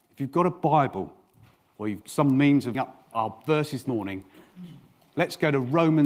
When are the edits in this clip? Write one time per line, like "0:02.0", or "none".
0:02.0
0:02.7
0:03.1
0:03.8